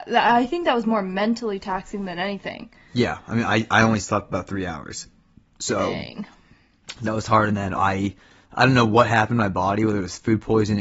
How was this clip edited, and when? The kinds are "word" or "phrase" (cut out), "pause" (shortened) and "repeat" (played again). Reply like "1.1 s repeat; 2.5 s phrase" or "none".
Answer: 7.7 s word